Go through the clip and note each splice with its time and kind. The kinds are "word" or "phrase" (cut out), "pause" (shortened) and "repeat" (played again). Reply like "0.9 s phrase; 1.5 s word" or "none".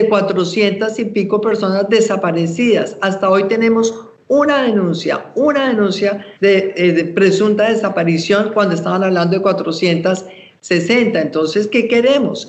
6.4 s pause